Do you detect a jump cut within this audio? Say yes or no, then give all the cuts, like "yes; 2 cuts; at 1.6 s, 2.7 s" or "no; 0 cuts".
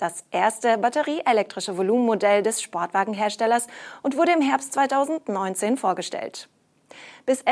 no; 0 cuts